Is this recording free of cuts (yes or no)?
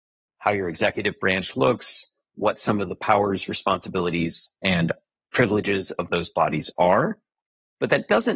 no